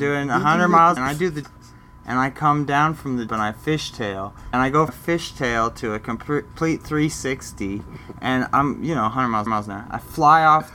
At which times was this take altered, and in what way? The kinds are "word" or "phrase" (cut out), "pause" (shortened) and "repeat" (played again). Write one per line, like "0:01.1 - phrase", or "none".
0:01.0 - phrase
0:01.4 - word
0:03.3 - word
0:04.5 - word
0:04.9 - word
0:09.5 - repeat